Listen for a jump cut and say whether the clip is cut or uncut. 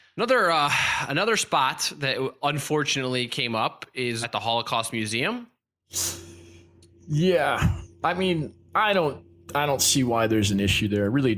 cut